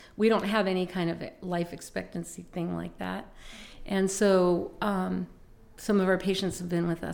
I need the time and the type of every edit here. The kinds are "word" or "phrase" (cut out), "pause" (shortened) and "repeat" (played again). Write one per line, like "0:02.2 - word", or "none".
none